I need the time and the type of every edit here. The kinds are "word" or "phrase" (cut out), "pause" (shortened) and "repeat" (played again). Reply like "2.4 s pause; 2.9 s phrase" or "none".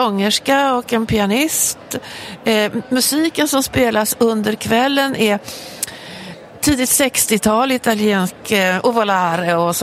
none